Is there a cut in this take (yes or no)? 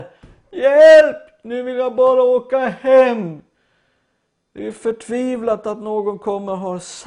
no